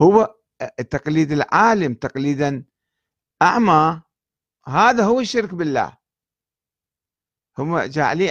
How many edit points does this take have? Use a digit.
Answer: 0